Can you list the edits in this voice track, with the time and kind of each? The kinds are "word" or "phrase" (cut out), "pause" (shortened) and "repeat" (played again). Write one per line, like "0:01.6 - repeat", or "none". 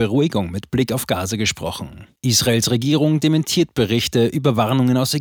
0:02.2 - pause

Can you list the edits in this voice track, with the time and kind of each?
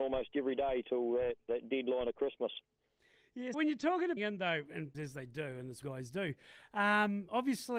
0:01.5 - word
0:03.5 - word
0:04.2 - phrase
0:04.9 - phrase
0:05.8 - phrase

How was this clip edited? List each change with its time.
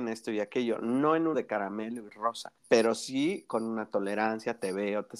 0:01.3 - word
0:02.6 - pause

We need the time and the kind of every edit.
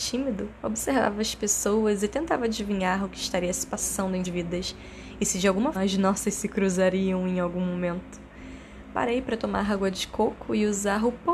0:04.2 - word
0:05.7 - word

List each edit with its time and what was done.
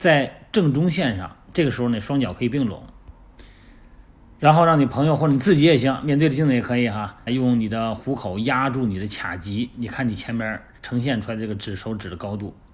0:07.3 - phrase

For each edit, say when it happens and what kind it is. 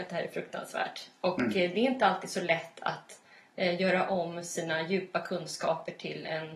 none

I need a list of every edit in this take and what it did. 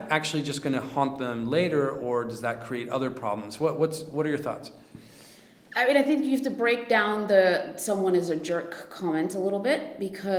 none

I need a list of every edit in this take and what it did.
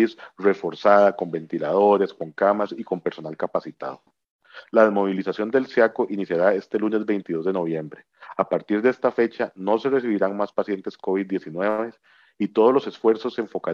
none

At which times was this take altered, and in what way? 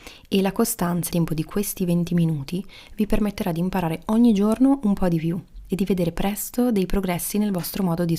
0:01.1 - phrase

